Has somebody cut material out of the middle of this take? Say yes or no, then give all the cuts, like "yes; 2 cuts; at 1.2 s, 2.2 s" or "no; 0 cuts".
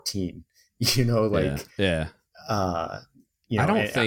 no; 0 cuts